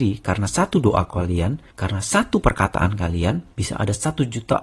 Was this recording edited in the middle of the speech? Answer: yes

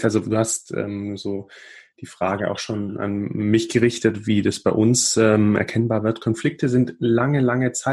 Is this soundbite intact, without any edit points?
yes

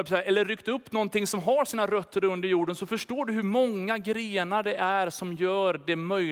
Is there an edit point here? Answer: no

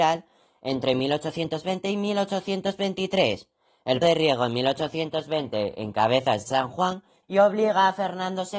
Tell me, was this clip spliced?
yes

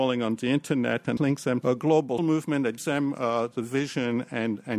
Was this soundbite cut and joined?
yes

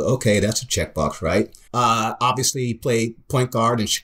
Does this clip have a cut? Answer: yes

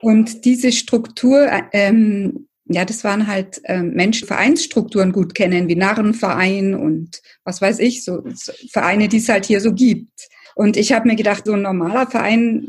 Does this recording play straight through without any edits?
no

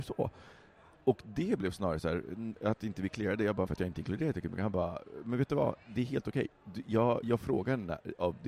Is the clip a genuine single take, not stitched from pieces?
no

